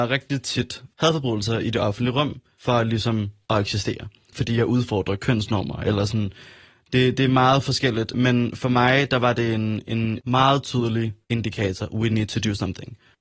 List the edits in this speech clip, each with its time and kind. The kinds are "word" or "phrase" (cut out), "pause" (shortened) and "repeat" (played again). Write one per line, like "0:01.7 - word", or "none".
0:11.2 - pause

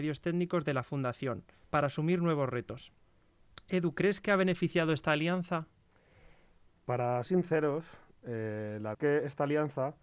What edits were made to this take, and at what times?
0:01.5 - pause
0:07.3 - word
0:08.9 - phrase

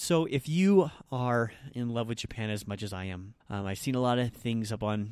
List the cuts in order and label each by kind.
0:03.4 - pause

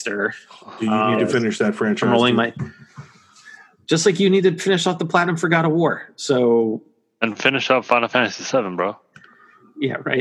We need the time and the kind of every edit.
none

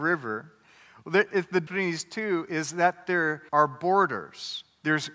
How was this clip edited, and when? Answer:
0:01.7 - word
0:03.5 - pause

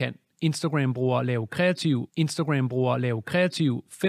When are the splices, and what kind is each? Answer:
0:02.1 - repeat

